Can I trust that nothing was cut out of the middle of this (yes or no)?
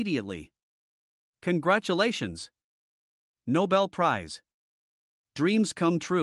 yes